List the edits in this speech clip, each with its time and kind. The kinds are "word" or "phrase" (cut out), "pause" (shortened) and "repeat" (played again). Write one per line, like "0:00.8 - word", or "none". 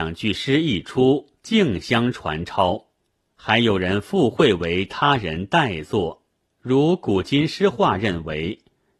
0:01.4 - pause
0:03.0 - pause
0:06.4 - pause

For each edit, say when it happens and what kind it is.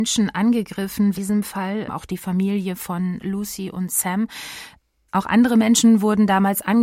0:01.1 - phrase

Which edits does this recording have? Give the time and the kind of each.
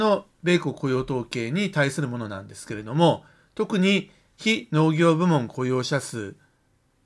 none

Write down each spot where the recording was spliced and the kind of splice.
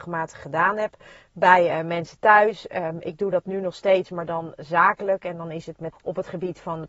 0:05.9 - word

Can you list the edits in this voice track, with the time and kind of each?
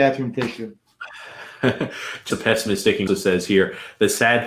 0:02.3 - word
0:03.1 - word

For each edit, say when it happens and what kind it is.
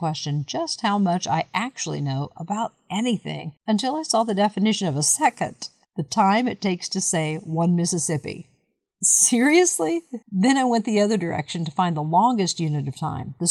0:03.6 - pause
0:05.8 - pause
0:10.2 - pause

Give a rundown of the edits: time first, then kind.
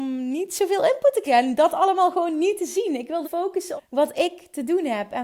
0:01.3 - word
0:03.2 - word
0:03.8 - word

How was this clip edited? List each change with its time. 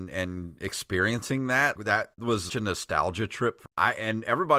0:01.8 - word
0:02.5 - word
0:03.7 - word

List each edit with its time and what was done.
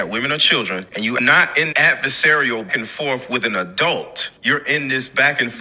0:01.7 - word
0:02.7 - word

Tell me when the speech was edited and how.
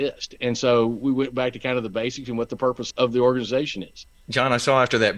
0:02.9 - word

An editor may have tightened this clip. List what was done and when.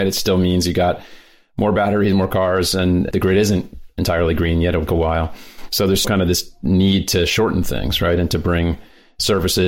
0:04.9 - word
0:06.0 - word

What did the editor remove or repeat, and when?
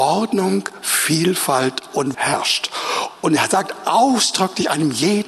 0:02.1 - word

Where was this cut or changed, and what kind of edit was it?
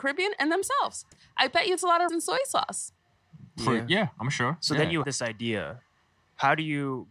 0:01.1 - word
0:01.8 - word
0:02.1 - word
0:05.0 - word

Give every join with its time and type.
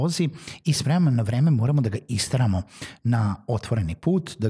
none

